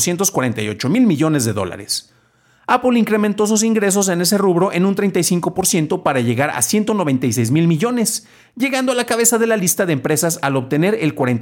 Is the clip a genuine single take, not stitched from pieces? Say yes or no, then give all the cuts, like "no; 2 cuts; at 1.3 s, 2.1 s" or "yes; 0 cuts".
yes; 0 cuts